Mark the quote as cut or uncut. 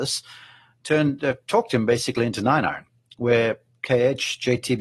uncut